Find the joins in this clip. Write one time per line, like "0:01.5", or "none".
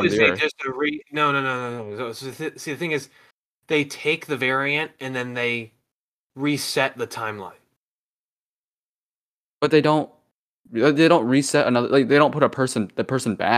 none